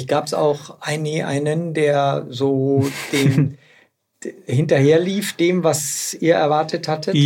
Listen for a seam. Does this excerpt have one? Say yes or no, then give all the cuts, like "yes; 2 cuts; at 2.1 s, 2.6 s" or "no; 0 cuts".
no; 0 cuts